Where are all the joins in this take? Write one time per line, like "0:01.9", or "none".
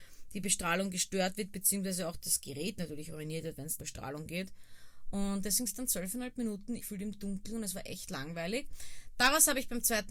0:03.8
0:05.7
0:06.8